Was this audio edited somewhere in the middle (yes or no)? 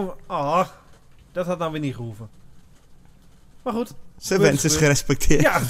no